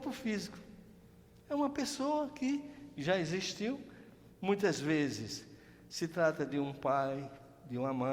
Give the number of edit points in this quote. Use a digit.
0